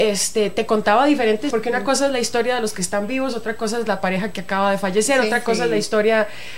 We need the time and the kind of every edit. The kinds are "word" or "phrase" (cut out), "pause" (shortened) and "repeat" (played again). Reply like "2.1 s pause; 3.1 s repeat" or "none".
1.5 s word